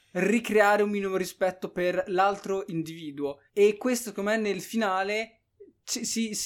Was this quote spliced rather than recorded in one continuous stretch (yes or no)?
yes